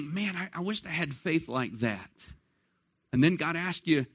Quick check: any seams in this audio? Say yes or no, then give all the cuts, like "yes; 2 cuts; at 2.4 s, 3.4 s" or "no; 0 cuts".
no; 0 cuts